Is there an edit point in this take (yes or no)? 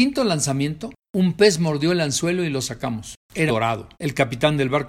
yes